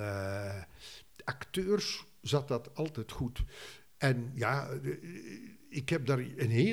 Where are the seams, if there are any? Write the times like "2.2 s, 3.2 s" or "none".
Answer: none